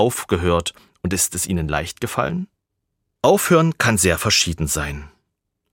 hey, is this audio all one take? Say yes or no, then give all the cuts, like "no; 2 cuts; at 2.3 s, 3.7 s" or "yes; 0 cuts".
yes; 0 cuts